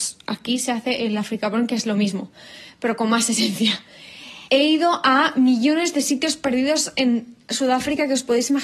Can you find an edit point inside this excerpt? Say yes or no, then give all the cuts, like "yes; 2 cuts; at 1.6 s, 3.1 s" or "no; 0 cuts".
yes; 1 cut; at 4.5 s